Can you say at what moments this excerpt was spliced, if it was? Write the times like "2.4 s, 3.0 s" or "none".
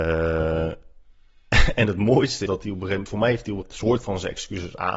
2.5 s, 3.6 s